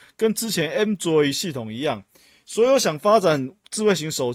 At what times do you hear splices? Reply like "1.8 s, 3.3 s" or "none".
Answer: none